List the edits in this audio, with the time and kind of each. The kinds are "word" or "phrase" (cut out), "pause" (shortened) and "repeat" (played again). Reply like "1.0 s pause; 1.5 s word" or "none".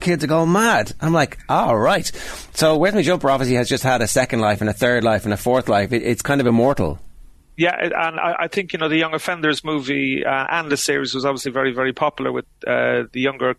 none